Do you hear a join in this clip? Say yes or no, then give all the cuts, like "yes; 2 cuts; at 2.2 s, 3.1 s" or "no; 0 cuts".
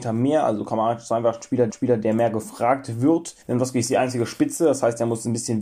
yes; 2 cuts; at 1.7 s, 3.4 s